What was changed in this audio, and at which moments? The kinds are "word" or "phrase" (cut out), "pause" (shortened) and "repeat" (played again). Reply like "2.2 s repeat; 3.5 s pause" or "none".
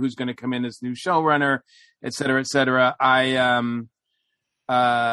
none